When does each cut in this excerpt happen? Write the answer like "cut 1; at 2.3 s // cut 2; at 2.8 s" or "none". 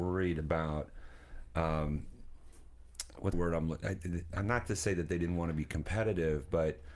cut 1; at 3.3 s

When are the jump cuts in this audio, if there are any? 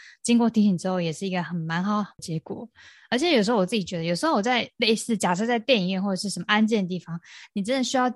none

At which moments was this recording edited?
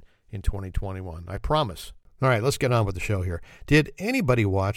none

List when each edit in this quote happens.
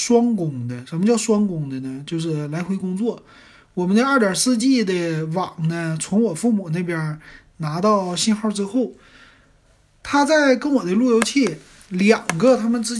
none

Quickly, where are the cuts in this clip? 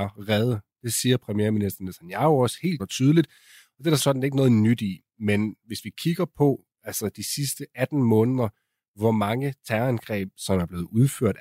cut 1; at 2.8 s // cut 2; at 4.0 s

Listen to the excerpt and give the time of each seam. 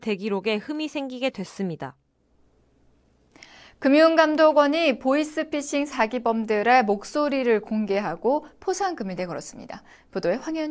none

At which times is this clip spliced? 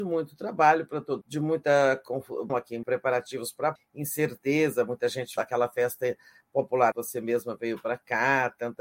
cut 1; at 1.2 s // cut 2; at 2.5 s // cut 3; at 2.8 s // cut 4; at 3.8 s // cut 5; at 5.4 s // cut 6; at 6.9 s

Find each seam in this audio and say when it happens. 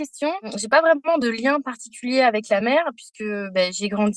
none

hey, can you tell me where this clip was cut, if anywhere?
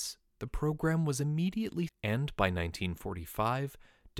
cut 1; at 1.9 s

